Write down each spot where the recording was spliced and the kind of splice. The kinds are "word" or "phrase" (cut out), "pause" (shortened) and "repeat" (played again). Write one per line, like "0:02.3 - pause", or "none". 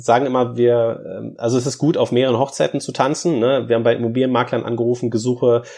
none

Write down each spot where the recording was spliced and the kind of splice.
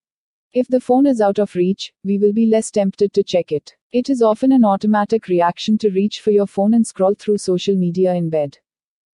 0:03.8 - pause

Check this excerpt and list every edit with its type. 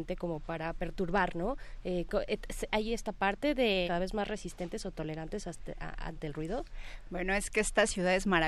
0:02.7 - word
0:03.9 - word

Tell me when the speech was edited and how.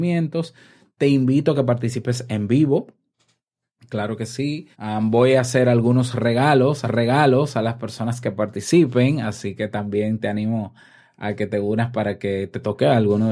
0:04.7 - pause
0:06.8 - repeat

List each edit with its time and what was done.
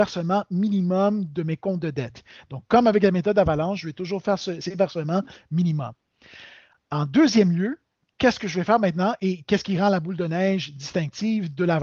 0:04.6 - word

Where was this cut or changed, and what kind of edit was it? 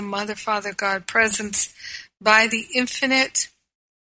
none

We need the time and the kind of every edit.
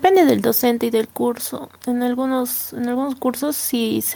none

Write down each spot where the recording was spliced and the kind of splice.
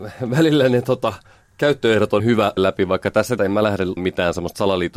0:02.2 - word
0:02.6 - word
0:03.4 - word
0:04.0 - word

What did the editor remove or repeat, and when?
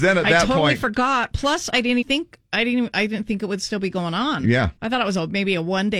0:02.0 - word
0:04.8 - pause

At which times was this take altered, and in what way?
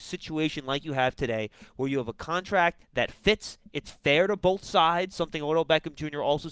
0:02.8 - pause

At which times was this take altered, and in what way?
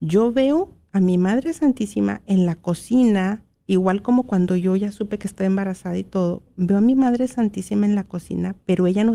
none

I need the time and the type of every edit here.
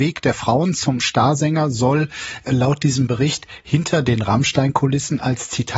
none

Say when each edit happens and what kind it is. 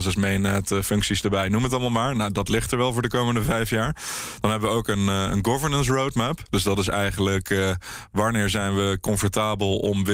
none

